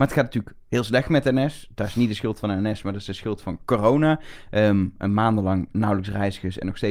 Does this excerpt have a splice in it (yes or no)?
no